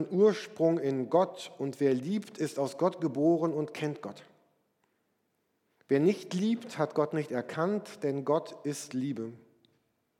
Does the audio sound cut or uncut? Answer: uncut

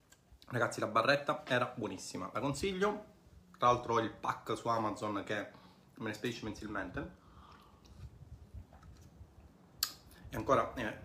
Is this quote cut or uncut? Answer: uncut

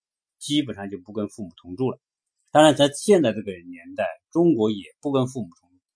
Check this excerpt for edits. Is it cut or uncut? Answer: cut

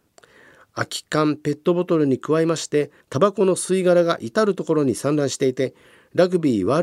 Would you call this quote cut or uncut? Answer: cut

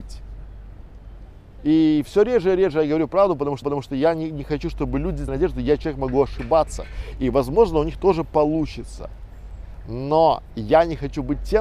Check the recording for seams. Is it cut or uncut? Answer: cut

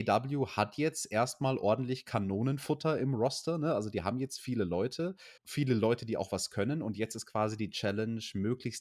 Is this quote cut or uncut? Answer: cut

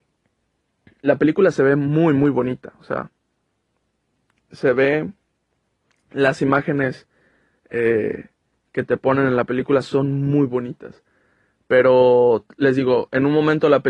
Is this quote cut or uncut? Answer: uncut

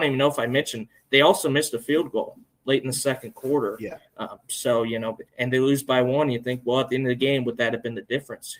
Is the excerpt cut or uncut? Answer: cut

